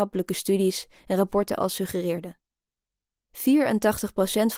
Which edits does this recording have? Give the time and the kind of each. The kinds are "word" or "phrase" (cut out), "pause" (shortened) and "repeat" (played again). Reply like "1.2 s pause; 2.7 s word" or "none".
none